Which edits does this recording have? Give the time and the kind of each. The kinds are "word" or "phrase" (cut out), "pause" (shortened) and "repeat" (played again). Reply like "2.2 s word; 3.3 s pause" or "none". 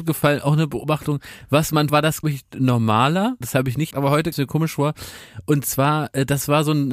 1.9 s word; 2.2 s word; 3.4 s word; 3.9 s word; 4.3 s word